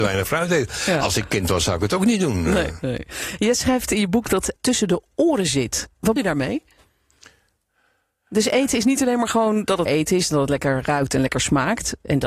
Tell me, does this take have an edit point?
yes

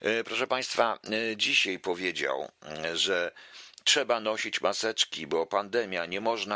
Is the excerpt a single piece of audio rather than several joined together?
yes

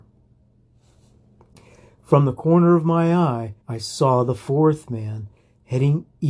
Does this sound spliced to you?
yes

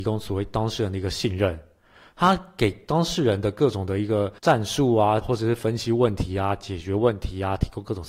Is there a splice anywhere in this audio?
yes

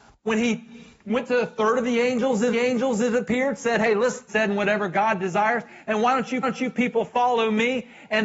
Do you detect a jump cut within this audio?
yes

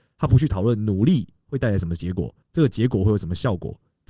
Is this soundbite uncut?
no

